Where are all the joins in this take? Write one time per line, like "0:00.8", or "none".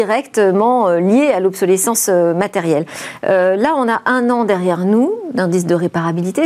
none